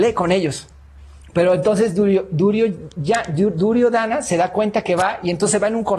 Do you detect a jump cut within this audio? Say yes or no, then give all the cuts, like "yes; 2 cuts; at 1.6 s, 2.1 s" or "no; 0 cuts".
no; 0 cuts